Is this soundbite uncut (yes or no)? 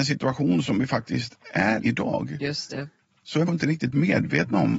no